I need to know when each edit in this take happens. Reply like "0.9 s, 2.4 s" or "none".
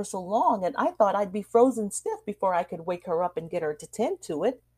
none